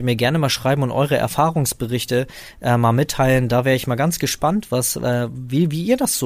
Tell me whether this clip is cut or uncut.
uncut